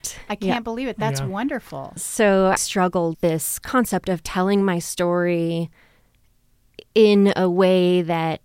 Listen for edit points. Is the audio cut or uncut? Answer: cut